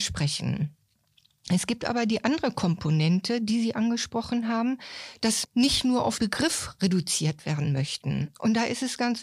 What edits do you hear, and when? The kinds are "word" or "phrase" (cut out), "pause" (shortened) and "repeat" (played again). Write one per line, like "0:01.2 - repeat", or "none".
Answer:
0:05.4 - word
0:06.2 - word